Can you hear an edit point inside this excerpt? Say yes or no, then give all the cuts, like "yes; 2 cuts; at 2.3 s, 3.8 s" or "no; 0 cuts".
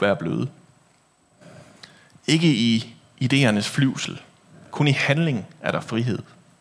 no; 0 cuts